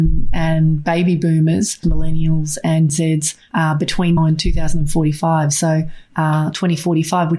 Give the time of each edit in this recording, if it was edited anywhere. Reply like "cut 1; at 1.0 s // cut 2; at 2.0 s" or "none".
cut 1; at 1.8 s // cut 2; at 2.9 s // cut 3; at 4.2 s